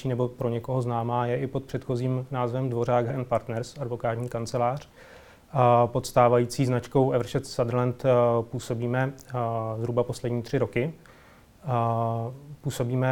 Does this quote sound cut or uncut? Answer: cut